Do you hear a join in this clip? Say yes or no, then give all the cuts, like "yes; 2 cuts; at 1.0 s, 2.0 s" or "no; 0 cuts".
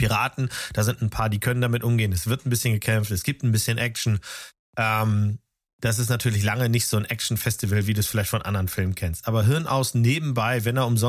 no; 0 cuts